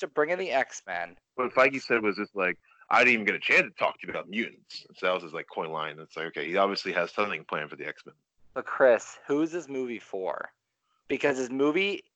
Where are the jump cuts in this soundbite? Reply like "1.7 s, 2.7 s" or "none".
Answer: 1.3 s, 8.4 s